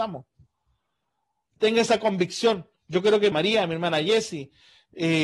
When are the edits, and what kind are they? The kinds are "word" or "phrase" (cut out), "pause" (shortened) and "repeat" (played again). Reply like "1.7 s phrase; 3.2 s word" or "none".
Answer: 3.3 s word